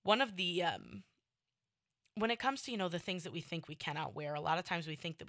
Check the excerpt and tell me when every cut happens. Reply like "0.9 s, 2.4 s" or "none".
none